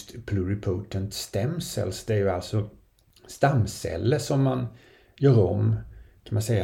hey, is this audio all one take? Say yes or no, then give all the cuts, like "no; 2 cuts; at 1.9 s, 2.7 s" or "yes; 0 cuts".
yes; 0 cuts